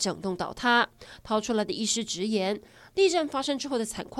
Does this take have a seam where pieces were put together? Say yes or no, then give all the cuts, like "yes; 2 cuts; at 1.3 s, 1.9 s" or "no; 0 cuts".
no; 0 cuts